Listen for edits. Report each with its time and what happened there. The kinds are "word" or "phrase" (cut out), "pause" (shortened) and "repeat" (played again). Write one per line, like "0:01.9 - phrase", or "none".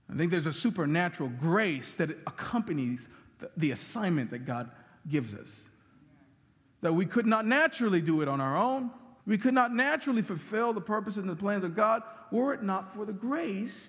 0:09.2 - pause